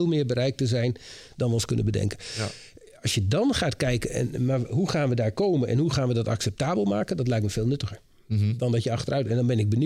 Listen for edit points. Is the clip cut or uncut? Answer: uncut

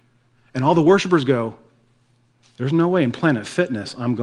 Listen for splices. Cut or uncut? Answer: uncut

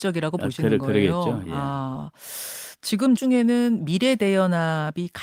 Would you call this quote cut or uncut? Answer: cut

